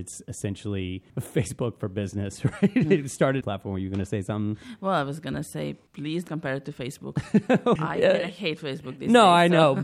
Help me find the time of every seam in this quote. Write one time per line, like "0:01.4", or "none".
0:01.1
0:03.4
0:05.9
0:06.3
0:07.8